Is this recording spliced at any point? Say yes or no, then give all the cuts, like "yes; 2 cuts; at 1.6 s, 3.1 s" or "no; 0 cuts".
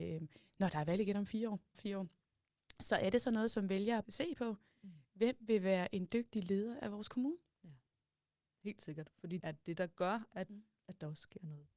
yes; 3 cuts; at 1.7 s, 4.0 s, 9.4 s